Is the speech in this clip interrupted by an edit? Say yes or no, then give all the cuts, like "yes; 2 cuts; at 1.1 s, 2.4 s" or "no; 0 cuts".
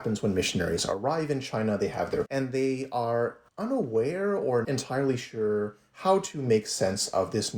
yes; 3 cuts; at 2.3 s, 3.5 s, 4.6 s